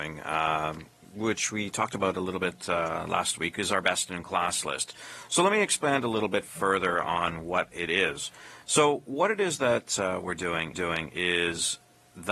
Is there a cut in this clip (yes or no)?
yes